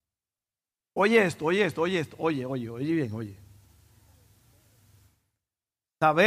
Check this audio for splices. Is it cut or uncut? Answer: uncut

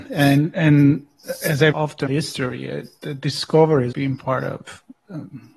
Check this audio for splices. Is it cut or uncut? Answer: cut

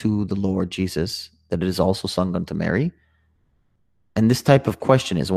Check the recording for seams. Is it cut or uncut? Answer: uncut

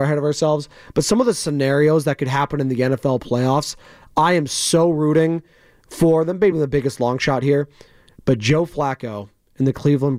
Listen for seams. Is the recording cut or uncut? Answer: uncut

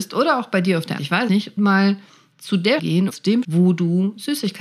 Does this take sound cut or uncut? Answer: cut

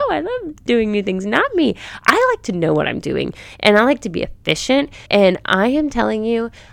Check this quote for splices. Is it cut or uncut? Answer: cut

